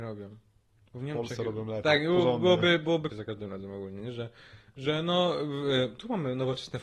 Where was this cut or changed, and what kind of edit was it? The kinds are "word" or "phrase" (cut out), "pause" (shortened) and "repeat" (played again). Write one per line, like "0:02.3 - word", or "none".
0:03.1 - phrase